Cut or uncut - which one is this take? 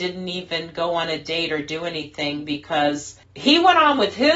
cut